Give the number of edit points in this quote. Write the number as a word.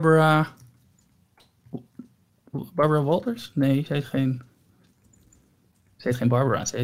zero